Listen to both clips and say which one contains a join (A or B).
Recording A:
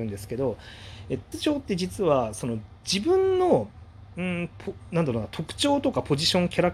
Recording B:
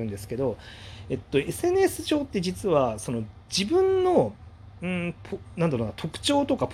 A